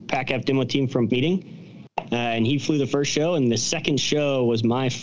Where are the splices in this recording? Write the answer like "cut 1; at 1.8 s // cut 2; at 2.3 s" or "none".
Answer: cut 1; at 1.1 s